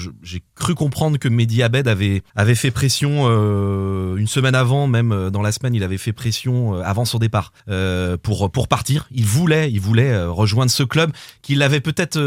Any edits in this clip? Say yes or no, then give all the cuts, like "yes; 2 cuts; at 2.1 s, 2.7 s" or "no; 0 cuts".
yes; 2 cuts; at 2.3 s, 7.6 s